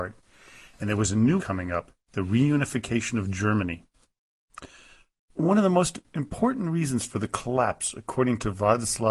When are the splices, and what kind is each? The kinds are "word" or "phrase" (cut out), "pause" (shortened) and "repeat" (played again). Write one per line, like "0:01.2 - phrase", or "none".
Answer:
0:01.4 - word
0:02.0 - pause